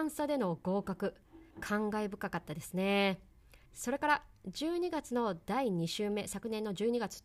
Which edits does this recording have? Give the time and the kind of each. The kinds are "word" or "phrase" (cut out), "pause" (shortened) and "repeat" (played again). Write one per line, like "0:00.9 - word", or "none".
0:01.5 - pause
0:03.7 - pause

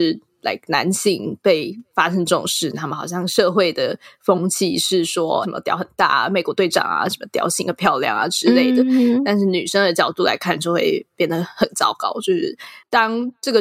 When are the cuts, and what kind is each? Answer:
0:05.4 - phrase

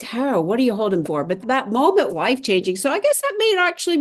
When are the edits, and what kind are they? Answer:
0:01.0 - word
0:01.4 - word
0:02.1 - word

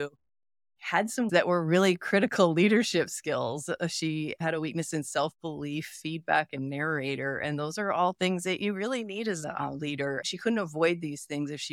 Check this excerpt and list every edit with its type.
0:01.3 - word

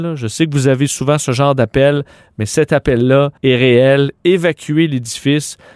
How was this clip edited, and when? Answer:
0:03.4 - pause

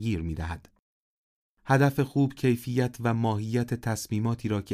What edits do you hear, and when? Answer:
none

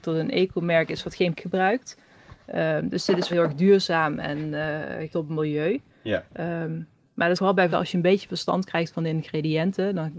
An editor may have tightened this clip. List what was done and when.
0:01.3 - word
0:03.3 - word
0:05.1 - word
0:07.4 - word
0:07.7 - word

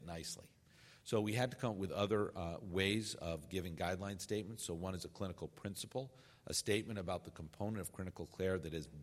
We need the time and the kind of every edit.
none

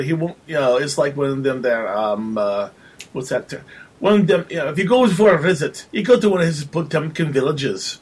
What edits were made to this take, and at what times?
0:03.1 - pause
0:05.9 - pause

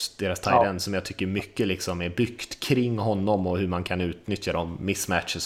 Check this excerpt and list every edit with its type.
none

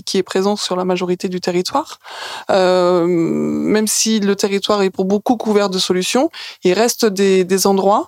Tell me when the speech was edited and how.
none

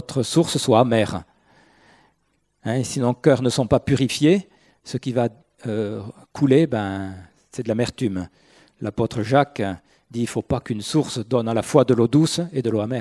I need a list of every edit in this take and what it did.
none

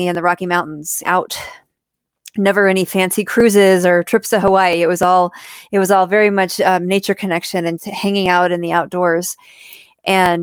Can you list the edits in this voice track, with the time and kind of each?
0:01.0 - phrase
0:07.8 - word

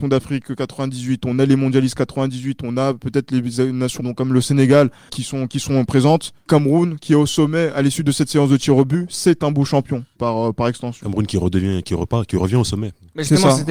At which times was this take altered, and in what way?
0:04.0 - phrase
0:05.1 - word
0:06.5 - word
0:10.2 - word

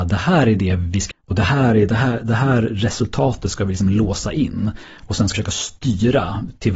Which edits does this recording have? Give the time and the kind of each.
0:01.1 - word
0:05.3 - word

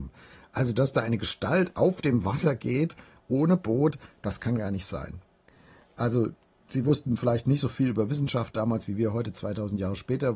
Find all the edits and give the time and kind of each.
none

